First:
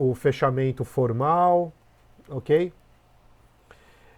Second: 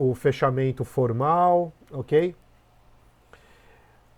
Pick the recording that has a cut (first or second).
second